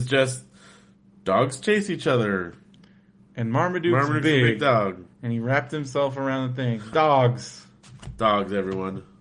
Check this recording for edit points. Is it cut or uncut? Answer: cut